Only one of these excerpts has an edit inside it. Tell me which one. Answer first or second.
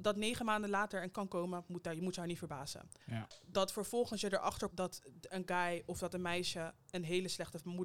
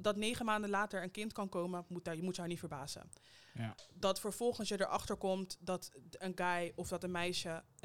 first